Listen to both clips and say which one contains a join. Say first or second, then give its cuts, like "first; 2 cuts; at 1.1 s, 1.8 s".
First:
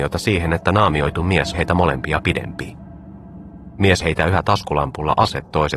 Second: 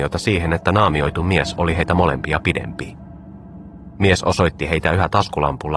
first; 2 cuts; at 1.5 s, 4.0 s